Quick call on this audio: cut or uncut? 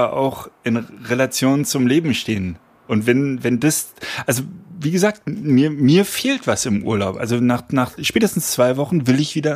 uncut